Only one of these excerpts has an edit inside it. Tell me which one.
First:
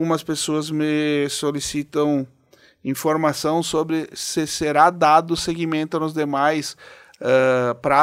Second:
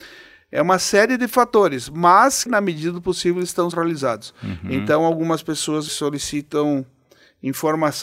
second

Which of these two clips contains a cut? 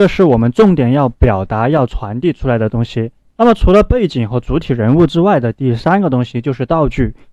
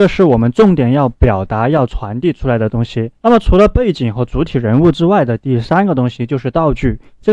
second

